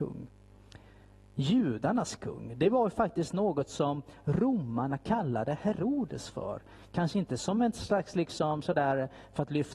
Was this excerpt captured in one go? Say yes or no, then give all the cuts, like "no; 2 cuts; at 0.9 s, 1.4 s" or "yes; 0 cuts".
yes; 0 cuts